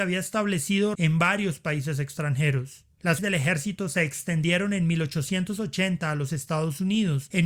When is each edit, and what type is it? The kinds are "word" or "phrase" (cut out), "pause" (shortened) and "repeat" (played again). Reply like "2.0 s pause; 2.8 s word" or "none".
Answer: 0.9 s word; 3.2 s word